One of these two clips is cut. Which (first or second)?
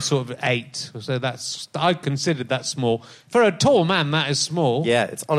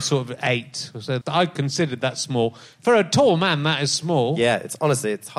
second